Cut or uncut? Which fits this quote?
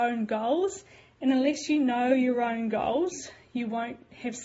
uncut